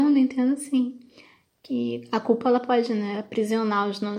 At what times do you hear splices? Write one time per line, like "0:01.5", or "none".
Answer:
none